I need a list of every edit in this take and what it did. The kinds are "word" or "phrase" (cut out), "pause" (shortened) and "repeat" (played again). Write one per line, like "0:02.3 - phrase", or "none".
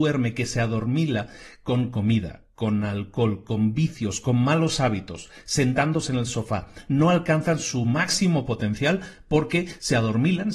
none